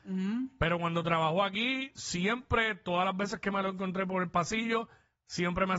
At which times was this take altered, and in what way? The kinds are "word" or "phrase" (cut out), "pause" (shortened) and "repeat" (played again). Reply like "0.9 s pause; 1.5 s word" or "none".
none